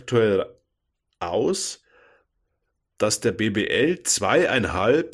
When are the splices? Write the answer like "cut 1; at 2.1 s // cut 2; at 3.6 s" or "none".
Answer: none